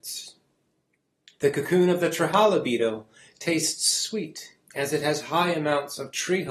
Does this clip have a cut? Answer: no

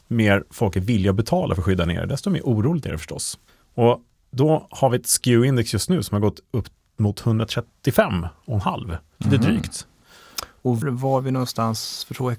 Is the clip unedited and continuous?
no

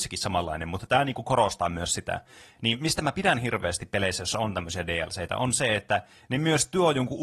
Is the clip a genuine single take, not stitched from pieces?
yes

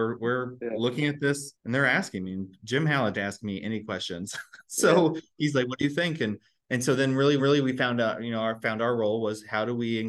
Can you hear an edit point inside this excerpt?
yes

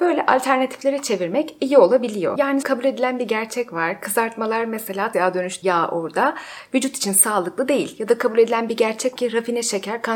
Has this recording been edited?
yes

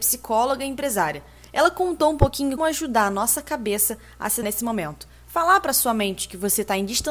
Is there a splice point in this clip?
yes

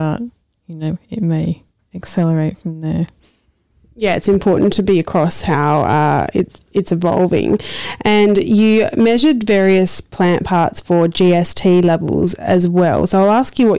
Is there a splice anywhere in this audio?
no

